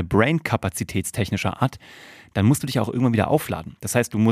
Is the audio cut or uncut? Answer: uncut